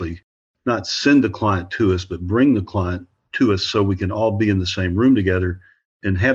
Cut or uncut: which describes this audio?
uncut